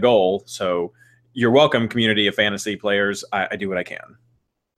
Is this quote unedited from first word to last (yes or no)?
yes